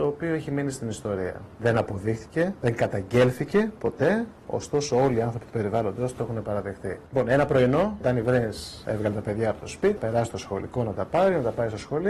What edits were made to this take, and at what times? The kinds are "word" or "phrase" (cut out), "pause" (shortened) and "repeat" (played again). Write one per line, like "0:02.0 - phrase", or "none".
0:08.0 - word
0:10.0 - word